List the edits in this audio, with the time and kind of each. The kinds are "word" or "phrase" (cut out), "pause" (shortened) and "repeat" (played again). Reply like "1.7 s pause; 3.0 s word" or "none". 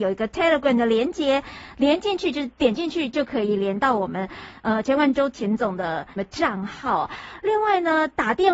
6.2 s word

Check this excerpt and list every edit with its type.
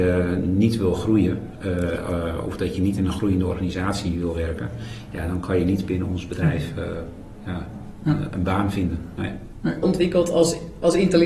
9.8 s phrase

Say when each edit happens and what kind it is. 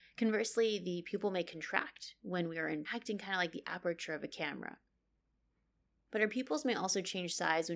2.8 s word

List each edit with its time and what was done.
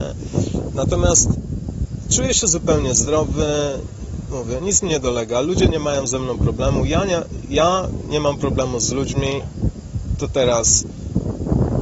none

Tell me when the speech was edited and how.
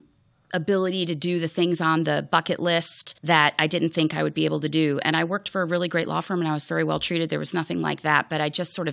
3.2 s pause

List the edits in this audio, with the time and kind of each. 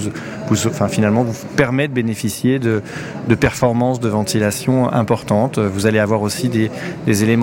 none

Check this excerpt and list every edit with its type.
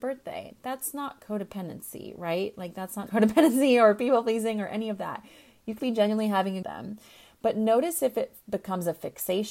3.1 s word; 5.8 s word; 6.6 s phrase

